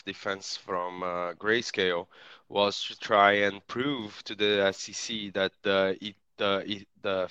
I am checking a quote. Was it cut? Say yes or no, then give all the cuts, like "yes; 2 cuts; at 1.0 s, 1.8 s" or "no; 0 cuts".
no; 0 cuts